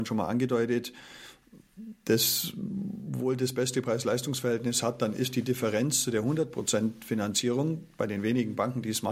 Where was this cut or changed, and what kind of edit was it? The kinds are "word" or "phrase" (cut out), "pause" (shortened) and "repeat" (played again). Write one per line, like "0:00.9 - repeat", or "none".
none